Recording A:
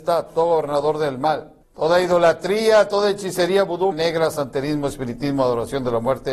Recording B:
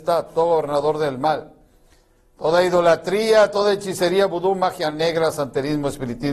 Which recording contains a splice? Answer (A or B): A